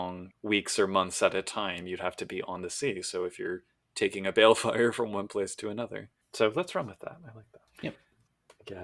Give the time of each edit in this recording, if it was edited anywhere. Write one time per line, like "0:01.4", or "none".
none